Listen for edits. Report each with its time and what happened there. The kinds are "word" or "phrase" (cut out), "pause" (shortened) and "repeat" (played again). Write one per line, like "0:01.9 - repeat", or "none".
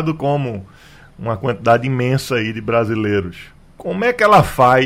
none